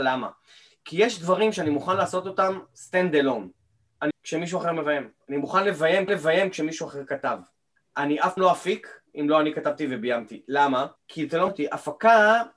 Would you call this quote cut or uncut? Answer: cut